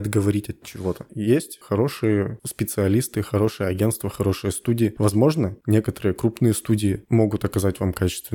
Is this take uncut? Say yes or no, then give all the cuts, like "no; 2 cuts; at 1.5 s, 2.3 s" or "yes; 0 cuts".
yes; 0 cuts